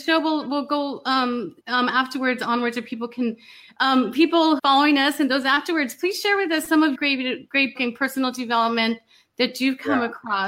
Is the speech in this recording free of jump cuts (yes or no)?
no